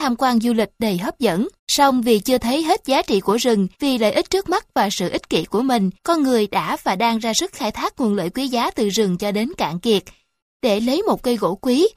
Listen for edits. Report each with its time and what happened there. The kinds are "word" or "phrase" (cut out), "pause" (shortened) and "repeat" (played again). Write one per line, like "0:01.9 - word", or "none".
0:01.6 - pause
0:03.7 - pause
0:06.0 - pause